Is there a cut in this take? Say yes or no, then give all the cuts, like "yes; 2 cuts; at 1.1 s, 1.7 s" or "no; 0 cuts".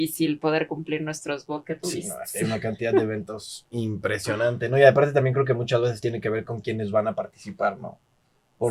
no; 0 cuts